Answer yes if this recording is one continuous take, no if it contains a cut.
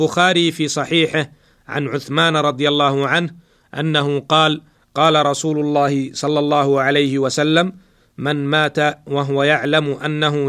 yes